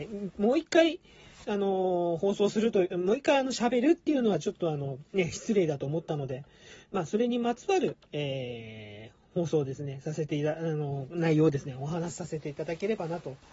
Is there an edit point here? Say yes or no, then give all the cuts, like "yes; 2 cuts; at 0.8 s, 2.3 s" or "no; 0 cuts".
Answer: yes; 2 cuts; at 5.1 s, 8.0 s